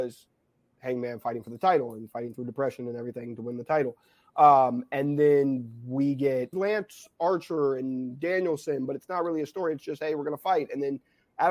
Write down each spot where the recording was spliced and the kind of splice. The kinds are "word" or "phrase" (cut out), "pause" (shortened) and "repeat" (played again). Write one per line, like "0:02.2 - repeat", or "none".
0:06.5 - phrase